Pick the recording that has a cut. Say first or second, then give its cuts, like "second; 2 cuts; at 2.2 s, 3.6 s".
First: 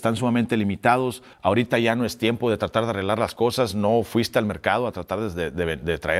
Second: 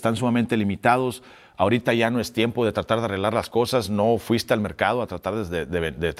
first; 1 cut; at 1.3 s